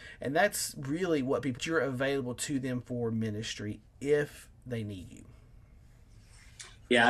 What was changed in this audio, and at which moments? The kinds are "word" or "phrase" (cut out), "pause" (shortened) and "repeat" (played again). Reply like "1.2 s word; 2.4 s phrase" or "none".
1.6 s phrase